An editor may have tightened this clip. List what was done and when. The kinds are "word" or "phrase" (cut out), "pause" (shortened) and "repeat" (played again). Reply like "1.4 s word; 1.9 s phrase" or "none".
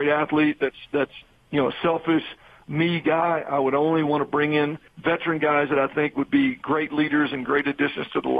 4.9 s pause